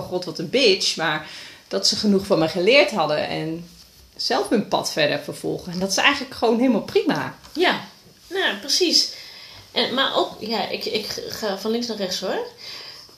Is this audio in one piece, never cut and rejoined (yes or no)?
yes